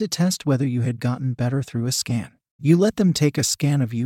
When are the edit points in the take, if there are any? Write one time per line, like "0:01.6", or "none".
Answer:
0:01.0